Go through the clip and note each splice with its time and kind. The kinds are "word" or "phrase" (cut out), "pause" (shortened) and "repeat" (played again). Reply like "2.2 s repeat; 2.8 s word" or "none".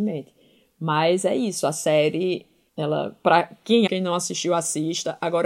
2.7 s word; 3.9 s word